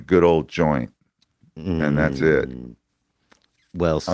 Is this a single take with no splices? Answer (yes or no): yes